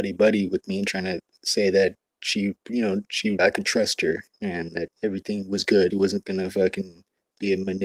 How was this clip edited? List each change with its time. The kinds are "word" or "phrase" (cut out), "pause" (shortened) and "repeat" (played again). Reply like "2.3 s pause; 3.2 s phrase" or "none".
2.6 s pause; 3.4 s word; 4.3 s pause; 4.9 s pause; 5.9 s phrase